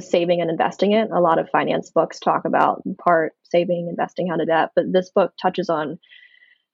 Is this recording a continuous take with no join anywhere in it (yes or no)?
no